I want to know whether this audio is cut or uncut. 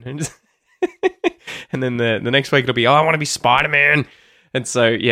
uncut